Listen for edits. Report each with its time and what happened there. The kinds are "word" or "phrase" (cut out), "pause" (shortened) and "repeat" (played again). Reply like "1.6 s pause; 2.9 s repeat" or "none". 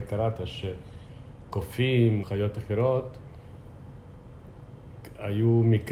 2.2 s word